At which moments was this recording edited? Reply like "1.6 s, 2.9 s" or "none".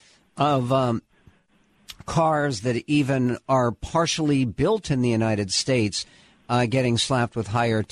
none